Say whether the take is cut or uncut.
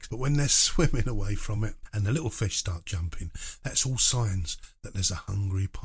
uncut